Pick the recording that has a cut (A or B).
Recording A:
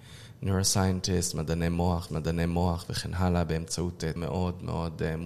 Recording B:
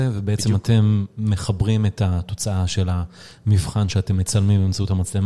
A